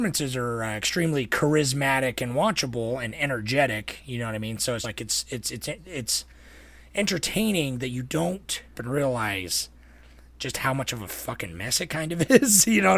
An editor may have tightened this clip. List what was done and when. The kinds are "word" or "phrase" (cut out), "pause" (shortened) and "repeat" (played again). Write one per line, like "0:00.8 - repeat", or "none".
0:04.8 - word
0:08.7 - word